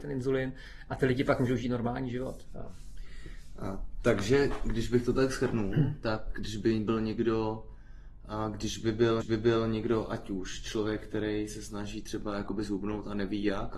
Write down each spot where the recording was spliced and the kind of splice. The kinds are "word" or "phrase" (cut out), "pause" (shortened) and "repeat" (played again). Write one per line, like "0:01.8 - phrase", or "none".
0:09.2 - repeat